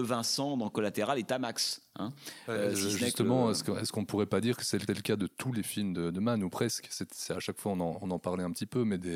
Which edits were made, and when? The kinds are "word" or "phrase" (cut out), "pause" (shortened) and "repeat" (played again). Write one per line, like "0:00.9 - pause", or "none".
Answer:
0:04.9 - repeat

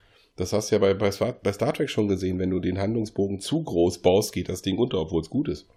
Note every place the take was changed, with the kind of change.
none

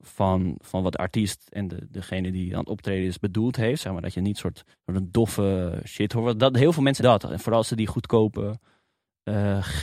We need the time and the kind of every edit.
0:04.7 - pause
0:07.0 - word

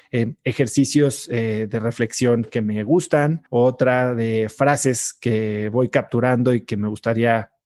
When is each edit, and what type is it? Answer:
0:03.5 - pause

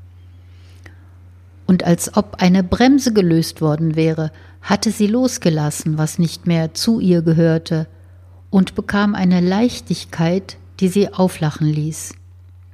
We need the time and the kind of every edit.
none

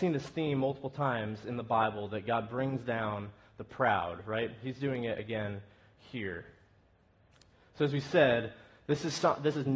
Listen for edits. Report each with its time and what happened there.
none

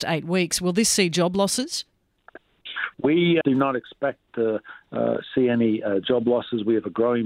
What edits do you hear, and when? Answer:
0:03.4 - word
0:04.3 - word

